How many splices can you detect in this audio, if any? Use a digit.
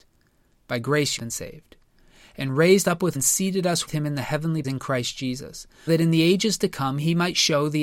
6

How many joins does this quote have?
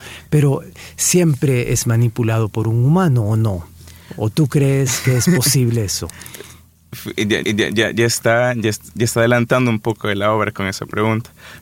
1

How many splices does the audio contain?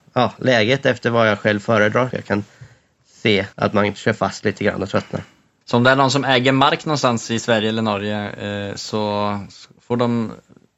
2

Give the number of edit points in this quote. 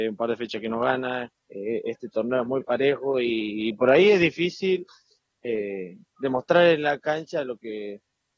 1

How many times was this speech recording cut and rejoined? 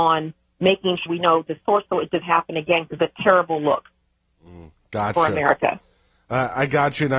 4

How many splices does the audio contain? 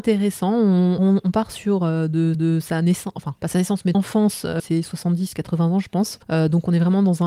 6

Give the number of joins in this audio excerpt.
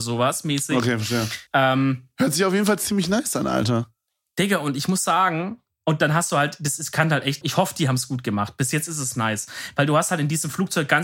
2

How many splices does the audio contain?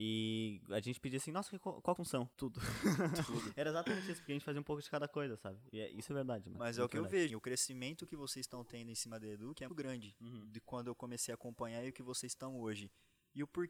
5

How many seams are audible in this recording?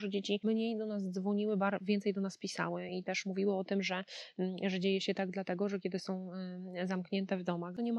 0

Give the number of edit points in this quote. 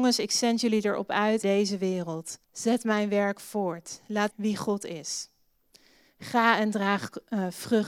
3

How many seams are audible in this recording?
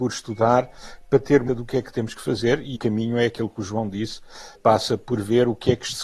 3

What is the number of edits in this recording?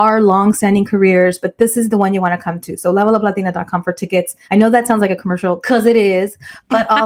1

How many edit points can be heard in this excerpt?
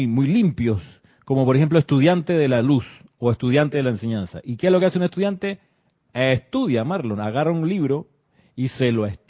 0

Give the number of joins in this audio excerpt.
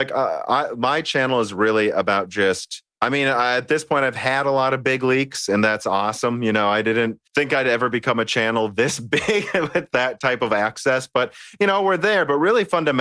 2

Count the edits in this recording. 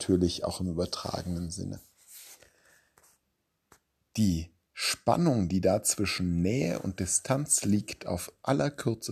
0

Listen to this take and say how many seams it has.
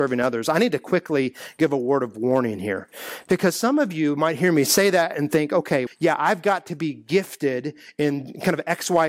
1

